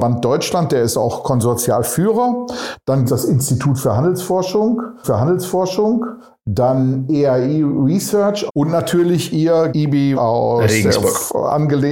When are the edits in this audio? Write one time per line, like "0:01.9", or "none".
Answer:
0:03.1
0:05.0
0:08.5
0:09.7
0:10.1